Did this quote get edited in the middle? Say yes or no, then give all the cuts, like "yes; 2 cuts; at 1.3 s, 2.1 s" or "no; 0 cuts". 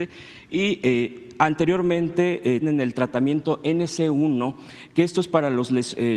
yes; 1 cut; at 2.6 s